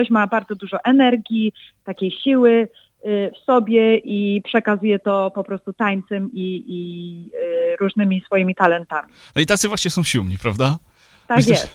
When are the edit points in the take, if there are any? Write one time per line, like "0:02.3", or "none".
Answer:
none